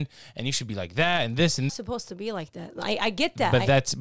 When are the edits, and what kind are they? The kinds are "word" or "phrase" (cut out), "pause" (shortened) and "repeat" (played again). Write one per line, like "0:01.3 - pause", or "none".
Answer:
0:01.7 - phrase